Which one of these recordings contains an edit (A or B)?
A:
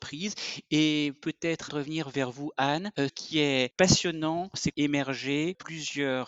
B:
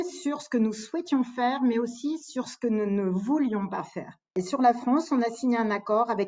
A